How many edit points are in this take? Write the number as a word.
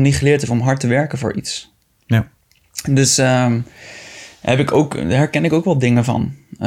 zero